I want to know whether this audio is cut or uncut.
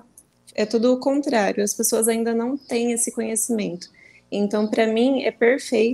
uncut